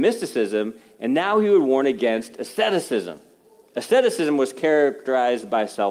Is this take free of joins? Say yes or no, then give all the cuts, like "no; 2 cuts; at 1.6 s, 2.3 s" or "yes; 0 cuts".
yes; 0 cuts